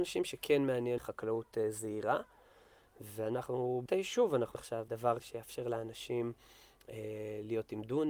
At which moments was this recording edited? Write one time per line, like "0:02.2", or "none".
0:01.0
0:03.9
0:04.5
0:04.9
0:05.2